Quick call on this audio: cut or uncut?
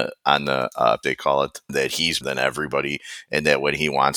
cut